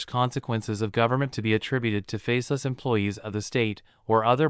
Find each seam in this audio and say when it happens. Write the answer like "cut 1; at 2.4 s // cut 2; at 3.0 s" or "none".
cut 1; at 1.3 s

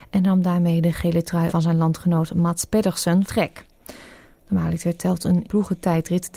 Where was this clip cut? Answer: cut 1; at 1.5 s // cut 2; at 3.3 s // cut 3; at 5.4 s

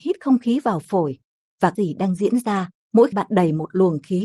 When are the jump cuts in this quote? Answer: cut 1; at 1.8 s // cut 2; at 3.1 s

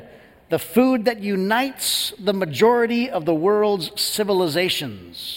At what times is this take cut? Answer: none

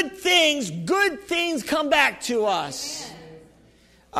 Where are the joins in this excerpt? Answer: none

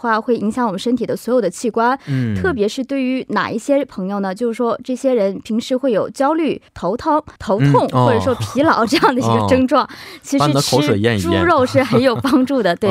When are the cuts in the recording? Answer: cut 1; at 6.7 s // cut 2; at 7.4 s

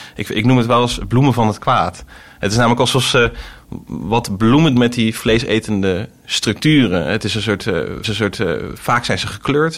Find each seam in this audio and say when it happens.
cut 1; at 4.8 s // cut 2; at 8.0 s

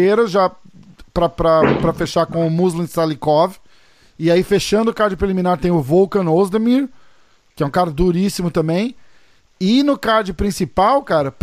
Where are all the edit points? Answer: none

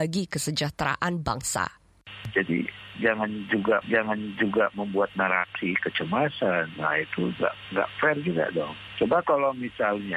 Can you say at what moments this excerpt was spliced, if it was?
cut 1; at 3.8 s // cut 2; at 5.8 s

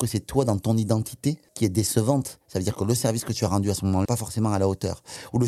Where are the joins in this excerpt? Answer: cut 1; at 1.5 s // cut 2; at 4.1 s

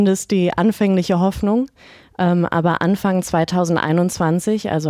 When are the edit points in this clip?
none

